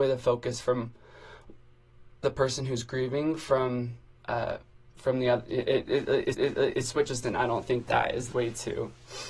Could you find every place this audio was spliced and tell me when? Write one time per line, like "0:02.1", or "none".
0:04.1
0:06.3
0:07.2
0:07.9
0:08.3